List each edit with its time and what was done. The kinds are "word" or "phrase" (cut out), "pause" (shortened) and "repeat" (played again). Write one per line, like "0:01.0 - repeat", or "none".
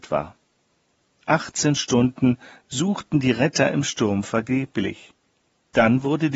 none